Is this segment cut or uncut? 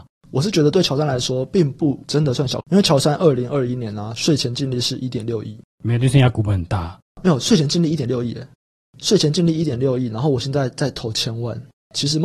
cut